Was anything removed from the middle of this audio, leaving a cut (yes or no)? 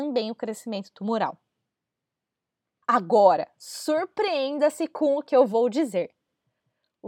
no